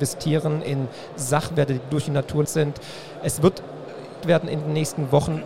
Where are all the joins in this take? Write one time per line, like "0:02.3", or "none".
0:02.4
0:04.2